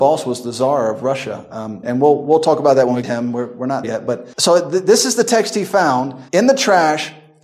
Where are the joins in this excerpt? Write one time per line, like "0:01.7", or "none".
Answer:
0:01.8
0:03.0
0:03.8
0:04.3
0:06.3